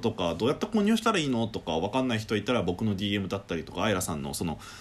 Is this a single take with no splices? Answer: yes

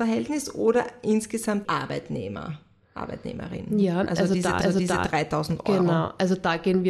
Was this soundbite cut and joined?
yes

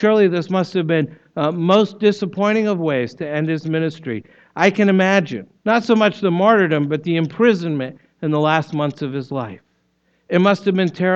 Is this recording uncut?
no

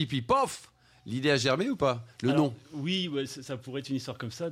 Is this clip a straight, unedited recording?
yes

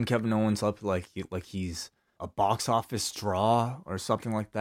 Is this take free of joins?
no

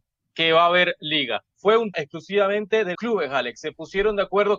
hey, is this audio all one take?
no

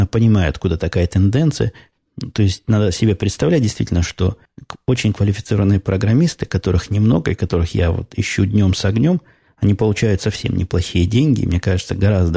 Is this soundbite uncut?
yes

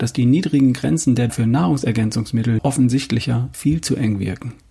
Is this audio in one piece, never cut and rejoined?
no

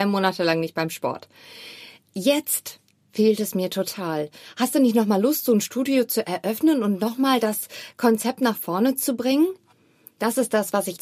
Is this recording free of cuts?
yes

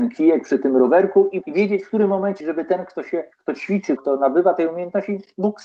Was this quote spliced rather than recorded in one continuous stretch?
yes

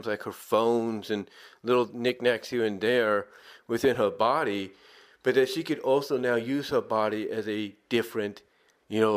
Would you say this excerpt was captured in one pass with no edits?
yes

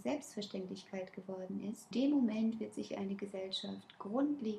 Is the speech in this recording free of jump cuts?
no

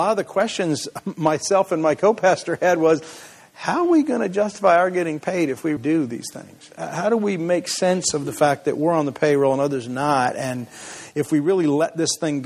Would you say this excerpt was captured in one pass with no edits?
no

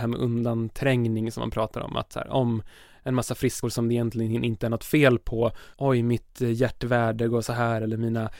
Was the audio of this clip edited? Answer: yes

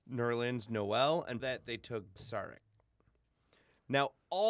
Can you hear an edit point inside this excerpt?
yes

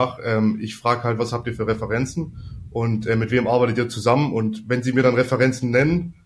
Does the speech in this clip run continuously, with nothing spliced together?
yes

